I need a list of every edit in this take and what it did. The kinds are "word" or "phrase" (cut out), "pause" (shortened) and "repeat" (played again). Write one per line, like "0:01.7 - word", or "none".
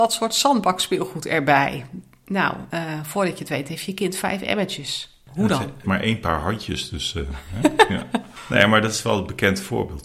0:05.8 - phrase